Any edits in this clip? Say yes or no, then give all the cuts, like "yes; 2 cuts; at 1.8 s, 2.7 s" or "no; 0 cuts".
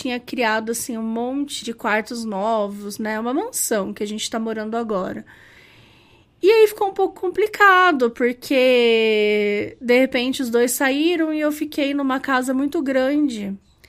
yes; 1 cut; at 1.6 s